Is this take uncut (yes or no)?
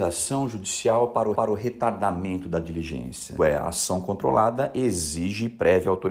no